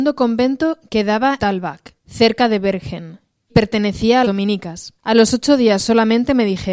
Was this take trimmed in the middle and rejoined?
yes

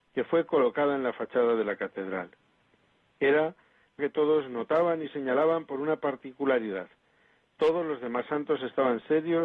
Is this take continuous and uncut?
no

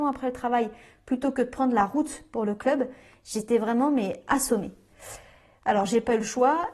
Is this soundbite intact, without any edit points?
yes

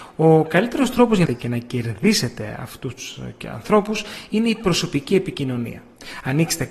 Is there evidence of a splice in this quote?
yes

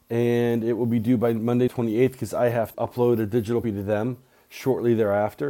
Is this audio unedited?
no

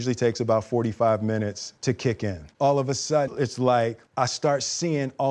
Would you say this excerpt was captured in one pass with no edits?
no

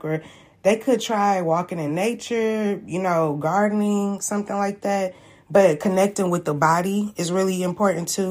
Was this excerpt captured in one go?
yes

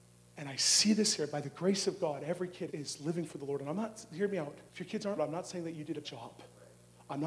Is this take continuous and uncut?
no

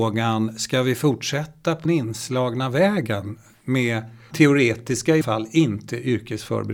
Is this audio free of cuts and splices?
no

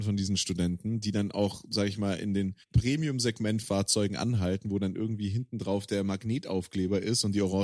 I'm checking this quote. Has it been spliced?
yes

